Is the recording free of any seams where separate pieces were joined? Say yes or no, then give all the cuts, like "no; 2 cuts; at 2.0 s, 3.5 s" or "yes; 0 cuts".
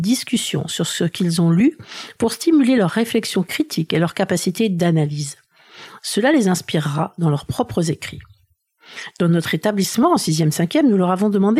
yes; 0 cuts